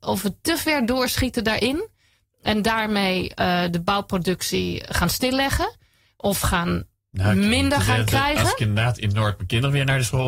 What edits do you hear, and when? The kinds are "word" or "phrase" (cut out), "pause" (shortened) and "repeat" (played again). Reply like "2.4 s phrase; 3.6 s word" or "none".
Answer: none

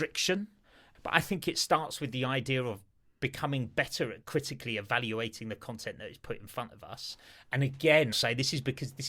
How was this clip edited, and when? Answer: 8.1 s word

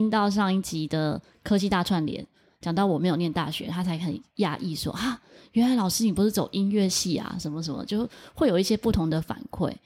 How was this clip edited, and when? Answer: none

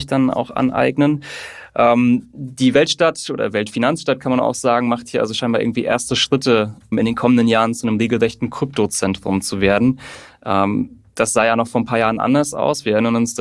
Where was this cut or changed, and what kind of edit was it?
6.9 s word

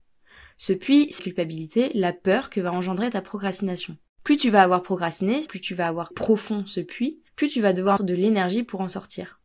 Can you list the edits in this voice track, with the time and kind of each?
1.2 s phrase; 4.1 s pause; 5.5 s word; 6.1 s word; 7.3 s pause; 8.0 s word

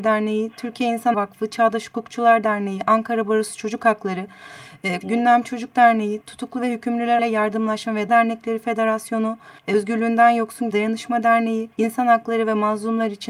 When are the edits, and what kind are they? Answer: 1.1 s word; 5.0 s word; 7.2 s word; 8.1 s word; 9.6 s pause; 10.7 s word; 11.7 s pause

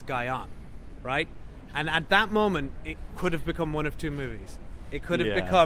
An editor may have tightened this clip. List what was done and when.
none

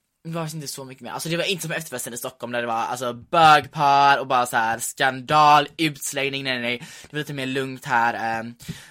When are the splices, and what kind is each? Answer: none

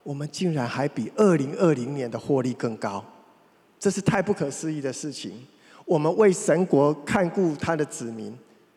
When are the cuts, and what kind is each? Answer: none

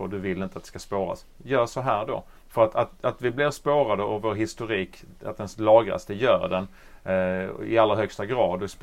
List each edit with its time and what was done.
2.4 s pause

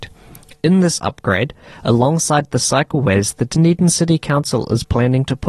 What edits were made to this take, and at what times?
none

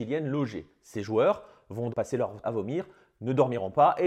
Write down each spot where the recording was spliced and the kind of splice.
1.9 s word; 2.4 s word

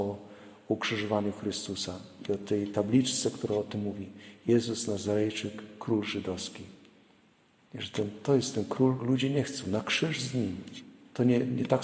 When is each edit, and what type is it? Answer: 9.0 s phrase

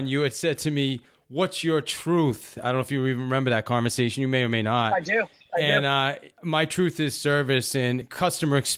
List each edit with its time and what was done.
none

